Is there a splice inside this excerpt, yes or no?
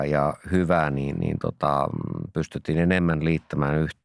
no